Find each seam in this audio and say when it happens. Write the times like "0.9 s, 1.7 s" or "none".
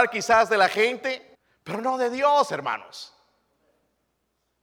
1.3 s